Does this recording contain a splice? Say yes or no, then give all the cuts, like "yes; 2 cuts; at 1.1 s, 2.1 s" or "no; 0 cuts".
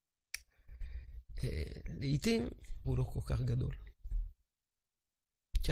yes; 1 cut; at 2.8 s